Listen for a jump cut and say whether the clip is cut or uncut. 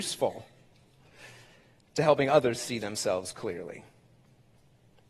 uncut